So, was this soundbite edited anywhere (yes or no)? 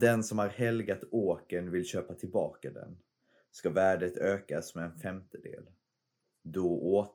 no